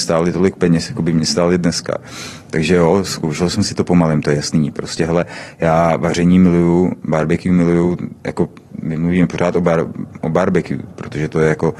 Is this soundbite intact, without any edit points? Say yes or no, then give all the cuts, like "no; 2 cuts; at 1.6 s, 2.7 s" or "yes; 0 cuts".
yes; 0 cuts